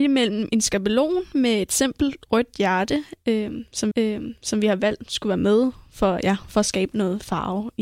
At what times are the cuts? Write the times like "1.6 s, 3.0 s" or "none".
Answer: 3.9 s